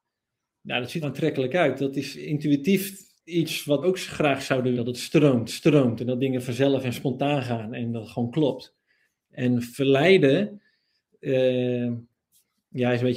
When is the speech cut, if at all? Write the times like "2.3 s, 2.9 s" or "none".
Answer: 1.0 s, 3.2 s, 3.8 s, 4.7 s, 5.5 s, 9.0 s